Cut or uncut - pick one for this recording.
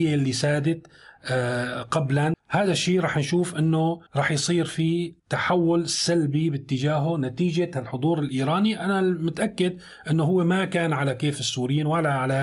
cut